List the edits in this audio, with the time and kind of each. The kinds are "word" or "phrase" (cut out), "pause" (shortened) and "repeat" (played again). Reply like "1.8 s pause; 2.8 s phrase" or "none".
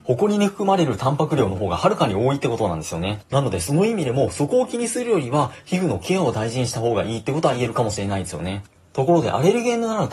none